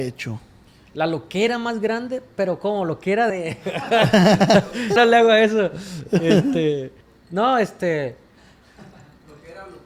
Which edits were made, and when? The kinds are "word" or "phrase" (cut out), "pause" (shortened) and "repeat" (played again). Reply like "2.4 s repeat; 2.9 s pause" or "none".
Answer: 3.3 s phrase; 5.0 s word; 7.0 s pause